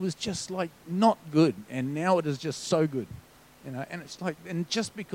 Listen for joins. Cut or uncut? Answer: cut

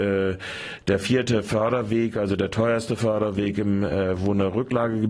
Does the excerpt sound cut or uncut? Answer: uncut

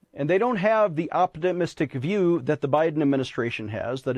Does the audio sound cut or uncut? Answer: uncut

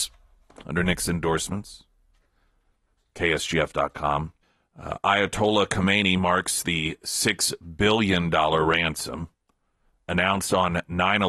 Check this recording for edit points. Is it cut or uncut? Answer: cut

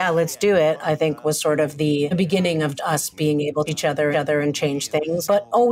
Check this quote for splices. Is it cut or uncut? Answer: cut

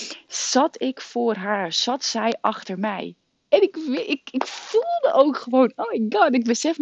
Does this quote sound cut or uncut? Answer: uncut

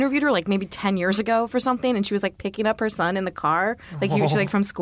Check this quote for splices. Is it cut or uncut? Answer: uncut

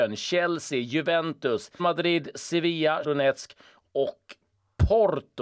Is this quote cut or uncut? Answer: cut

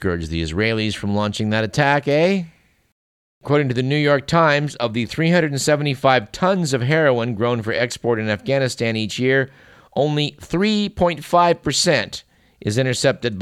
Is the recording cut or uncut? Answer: uncut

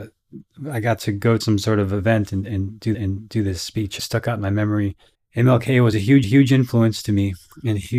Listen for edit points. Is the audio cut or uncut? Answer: cut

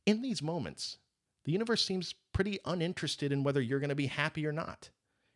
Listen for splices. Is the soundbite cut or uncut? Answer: uncut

